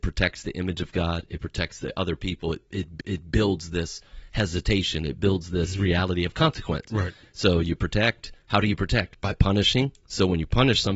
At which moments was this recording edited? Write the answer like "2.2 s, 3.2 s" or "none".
3.0 s